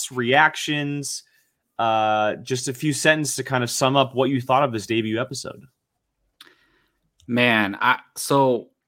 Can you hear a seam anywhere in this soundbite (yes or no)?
no